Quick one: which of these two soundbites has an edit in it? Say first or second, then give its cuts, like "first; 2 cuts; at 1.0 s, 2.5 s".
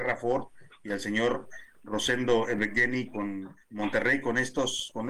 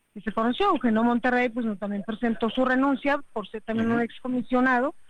first; 1 cut; at 3.6 s